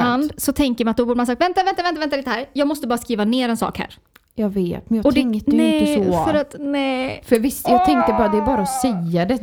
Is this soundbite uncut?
yes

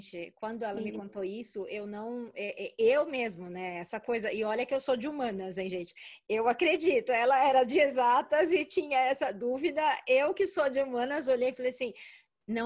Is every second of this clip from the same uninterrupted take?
yes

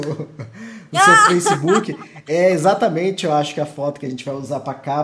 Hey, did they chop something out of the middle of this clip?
no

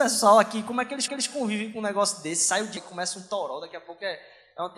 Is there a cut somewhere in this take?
yes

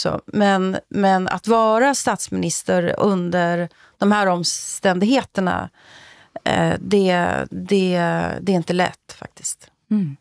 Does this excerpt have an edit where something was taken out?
no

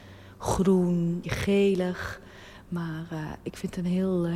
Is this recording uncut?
no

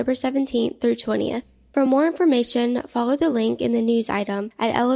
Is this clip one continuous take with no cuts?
yes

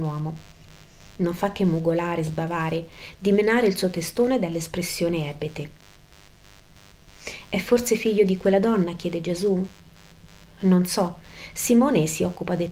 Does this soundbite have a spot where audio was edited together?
no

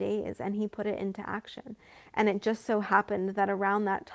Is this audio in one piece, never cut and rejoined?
yes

